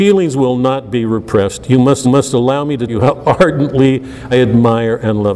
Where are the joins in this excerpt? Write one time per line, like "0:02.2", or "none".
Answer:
0:02.0
0:02.9
0:04.3